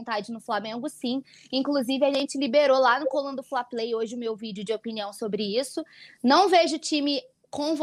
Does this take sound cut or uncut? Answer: uncut